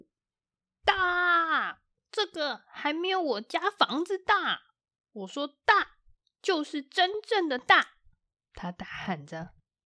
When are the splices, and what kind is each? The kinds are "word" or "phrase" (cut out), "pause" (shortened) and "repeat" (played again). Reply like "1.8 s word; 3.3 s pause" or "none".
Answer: none